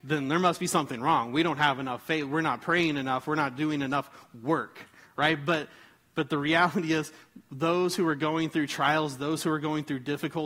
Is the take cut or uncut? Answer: uncut